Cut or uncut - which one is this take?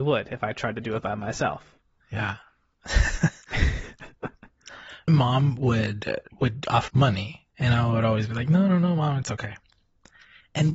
cut